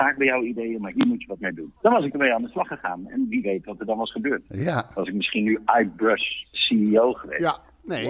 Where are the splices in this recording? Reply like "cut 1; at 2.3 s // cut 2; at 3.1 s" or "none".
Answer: cut 1; at 1.8 s